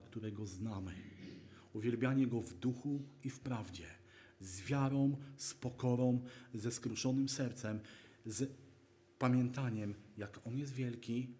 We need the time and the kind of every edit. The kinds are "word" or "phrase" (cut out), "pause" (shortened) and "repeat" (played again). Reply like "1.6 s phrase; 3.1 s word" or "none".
none